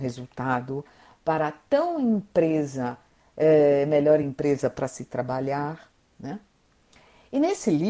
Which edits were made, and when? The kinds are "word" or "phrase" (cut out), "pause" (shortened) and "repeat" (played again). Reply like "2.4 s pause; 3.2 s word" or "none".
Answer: none